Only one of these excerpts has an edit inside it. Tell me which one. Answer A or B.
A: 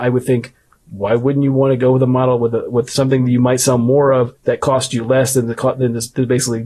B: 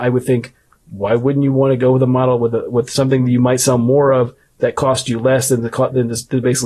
A